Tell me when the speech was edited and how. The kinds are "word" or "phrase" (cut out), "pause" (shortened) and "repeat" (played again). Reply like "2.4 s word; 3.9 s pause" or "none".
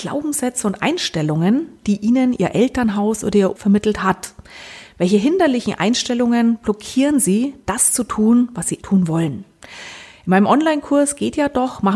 3.6 s phrase; 8.8 s word